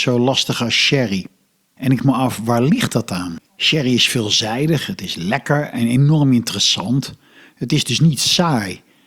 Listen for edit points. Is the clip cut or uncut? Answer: cut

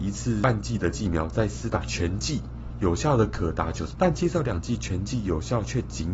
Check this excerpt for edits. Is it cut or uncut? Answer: cut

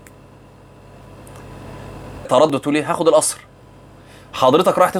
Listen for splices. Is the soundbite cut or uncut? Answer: cut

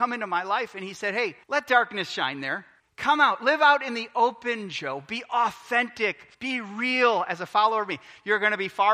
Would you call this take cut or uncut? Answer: cut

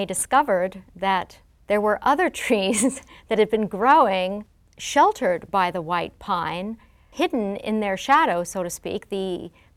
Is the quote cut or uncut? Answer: uncut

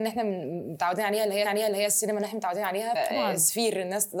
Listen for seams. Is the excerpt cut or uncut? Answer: cut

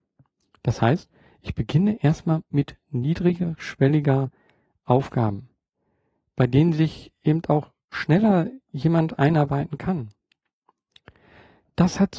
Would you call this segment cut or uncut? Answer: uncut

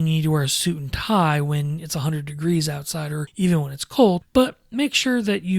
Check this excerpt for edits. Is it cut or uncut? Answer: uncut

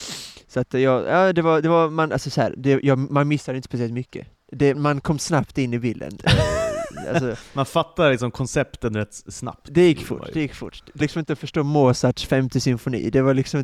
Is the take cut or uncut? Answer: cut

